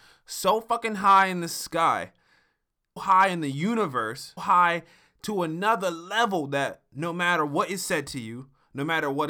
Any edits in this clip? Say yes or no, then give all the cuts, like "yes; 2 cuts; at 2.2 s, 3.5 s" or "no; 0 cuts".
yes; 2 cuts; at 3.0 s, 4.4 s